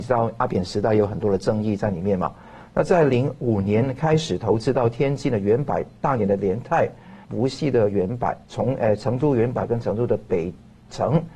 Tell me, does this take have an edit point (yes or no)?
yes